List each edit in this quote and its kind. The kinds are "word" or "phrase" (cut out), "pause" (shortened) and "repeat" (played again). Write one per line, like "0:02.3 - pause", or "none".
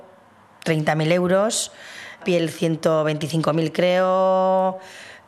0:02.2 - phrase

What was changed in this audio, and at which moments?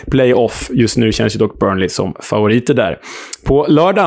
none

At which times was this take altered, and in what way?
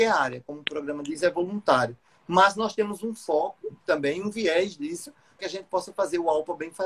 0:05.4 - word

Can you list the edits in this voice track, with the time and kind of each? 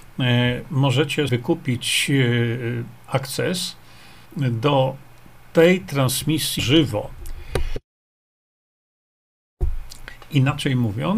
0:01.3 - word
0:04.3 - pause
0:06.6 - word

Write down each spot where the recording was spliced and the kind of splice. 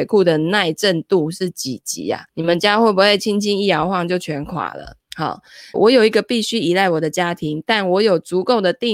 0:02.3 - pause
0:05.7 - phrase

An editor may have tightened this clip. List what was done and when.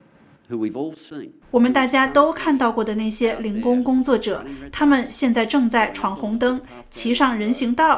0:01.4 - pause

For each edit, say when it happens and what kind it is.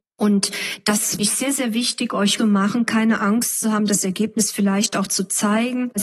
0:01.2 - word
0:02.4 - phrase

